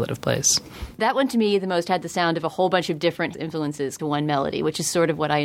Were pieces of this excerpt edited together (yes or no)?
yes